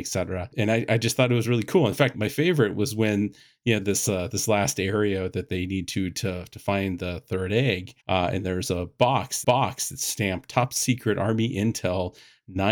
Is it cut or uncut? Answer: cut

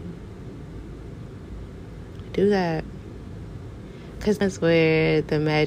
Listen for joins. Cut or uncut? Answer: cut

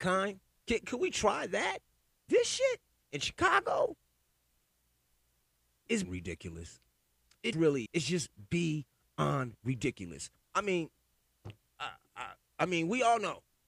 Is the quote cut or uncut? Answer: cut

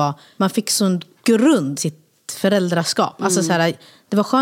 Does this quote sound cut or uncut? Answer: cut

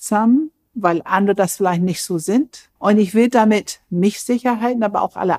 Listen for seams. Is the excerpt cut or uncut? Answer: cut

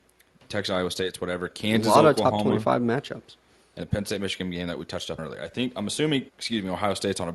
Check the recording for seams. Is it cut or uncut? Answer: cut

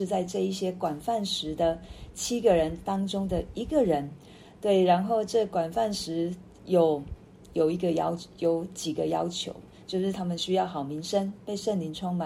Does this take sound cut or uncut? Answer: uncut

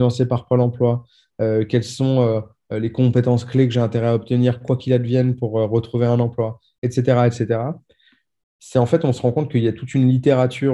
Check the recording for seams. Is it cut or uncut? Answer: uncut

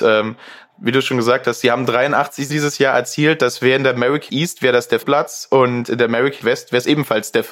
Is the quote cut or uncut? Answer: cut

